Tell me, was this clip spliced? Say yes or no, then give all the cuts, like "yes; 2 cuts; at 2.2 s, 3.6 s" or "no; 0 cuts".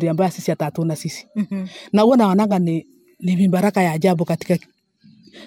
no; 0 cuts